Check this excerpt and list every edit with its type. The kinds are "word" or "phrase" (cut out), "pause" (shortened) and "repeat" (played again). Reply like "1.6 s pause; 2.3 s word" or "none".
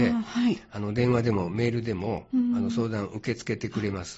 none